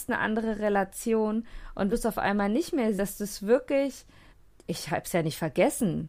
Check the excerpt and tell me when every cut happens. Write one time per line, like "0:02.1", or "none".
0:01.9
0:03.0
0:04.3